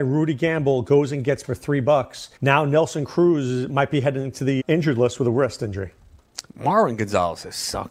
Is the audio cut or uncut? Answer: cut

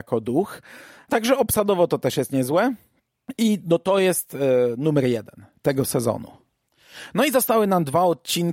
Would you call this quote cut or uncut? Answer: uncut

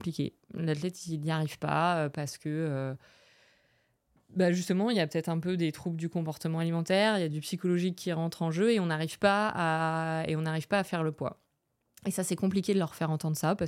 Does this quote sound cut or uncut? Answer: uncut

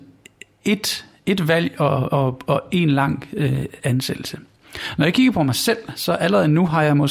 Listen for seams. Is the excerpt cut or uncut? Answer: uncut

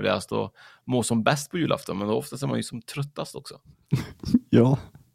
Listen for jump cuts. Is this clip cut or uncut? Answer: uncut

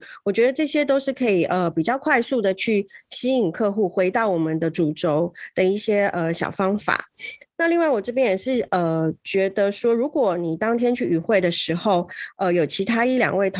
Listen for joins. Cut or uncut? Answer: uncut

